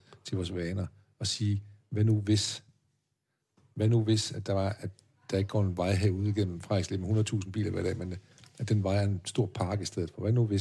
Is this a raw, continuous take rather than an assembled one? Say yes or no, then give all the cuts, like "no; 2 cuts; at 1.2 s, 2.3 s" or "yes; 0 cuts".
yes; 0 cuts